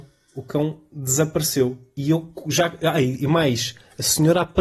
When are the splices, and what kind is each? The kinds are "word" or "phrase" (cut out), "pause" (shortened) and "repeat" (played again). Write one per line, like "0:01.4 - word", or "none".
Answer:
none